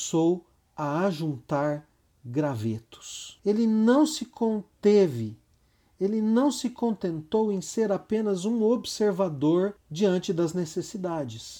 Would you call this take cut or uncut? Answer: uncut